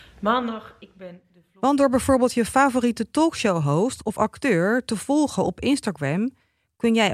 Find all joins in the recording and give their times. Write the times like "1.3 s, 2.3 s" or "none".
none